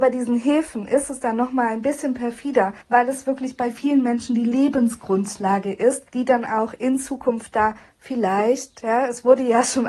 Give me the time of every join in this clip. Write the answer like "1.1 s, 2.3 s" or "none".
2.8 s, 6.1 s